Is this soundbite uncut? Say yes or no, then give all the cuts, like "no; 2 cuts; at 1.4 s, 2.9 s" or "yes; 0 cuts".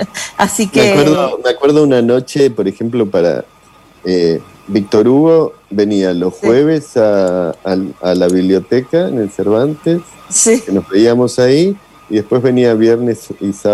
yes; 0 cuts